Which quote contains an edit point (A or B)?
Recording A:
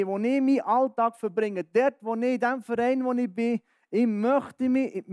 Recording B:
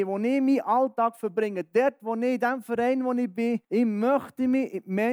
B